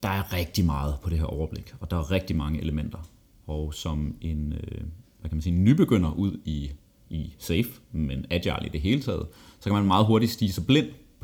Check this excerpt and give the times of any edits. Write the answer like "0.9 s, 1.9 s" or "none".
none